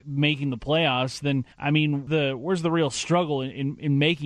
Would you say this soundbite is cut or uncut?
cut